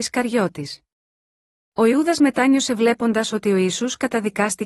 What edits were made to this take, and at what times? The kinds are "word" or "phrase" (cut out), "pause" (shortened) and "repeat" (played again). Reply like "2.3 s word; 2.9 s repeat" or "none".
none